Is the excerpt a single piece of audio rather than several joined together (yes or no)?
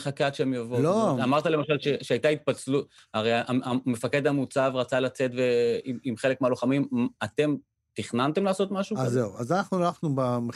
yes